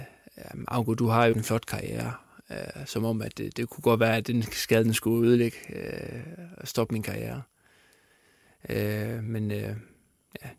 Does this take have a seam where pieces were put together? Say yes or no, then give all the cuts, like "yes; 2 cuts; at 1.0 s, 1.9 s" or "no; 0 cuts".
yes; 1 cut; at 1.3 s